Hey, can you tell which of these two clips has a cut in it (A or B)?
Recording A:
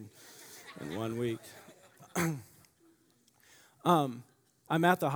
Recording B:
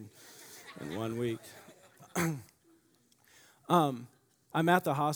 B